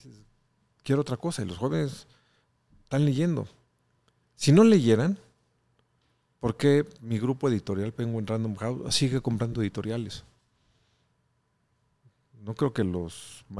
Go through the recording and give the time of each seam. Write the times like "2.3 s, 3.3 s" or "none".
none